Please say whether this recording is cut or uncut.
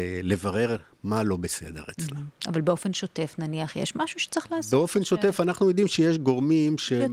uncut